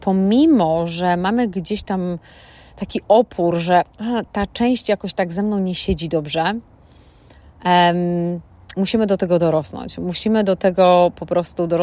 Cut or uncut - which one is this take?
uncut